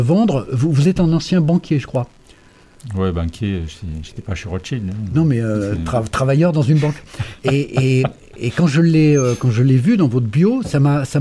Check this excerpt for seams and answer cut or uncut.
uncut